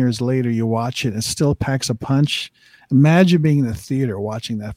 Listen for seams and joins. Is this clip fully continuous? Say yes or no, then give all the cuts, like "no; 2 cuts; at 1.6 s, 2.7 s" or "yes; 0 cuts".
yes; 0 cuts